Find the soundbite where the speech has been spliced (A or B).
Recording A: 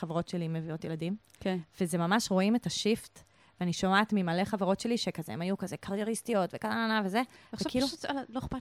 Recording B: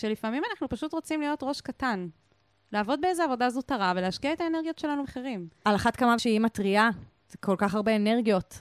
B